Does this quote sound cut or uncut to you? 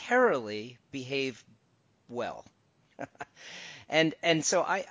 uncut